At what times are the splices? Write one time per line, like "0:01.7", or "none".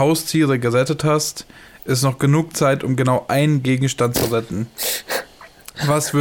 none

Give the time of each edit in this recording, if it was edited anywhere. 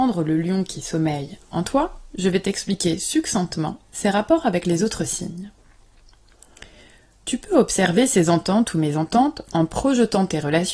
none

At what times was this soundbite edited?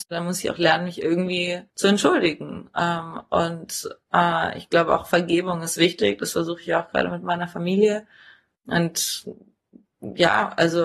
0:01.7

